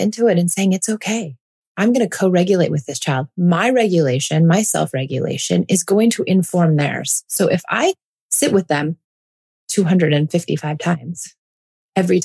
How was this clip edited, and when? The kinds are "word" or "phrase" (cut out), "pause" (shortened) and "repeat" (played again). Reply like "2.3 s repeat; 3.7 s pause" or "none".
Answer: none